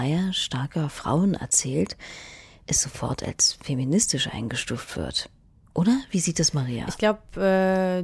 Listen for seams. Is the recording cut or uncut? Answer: uncut